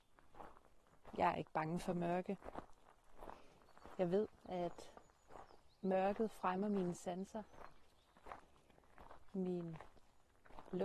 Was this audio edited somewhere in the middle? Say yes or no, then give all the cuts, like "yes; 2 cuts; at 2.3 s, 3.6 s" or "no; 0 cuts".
no; 0 cuts